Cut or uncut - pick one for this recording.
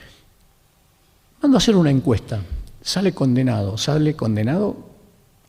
uncut